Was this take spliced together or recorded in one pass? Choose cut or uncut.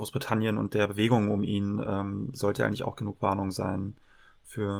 uncut